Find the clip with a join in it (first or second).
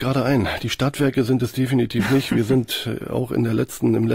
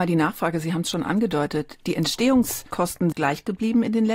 second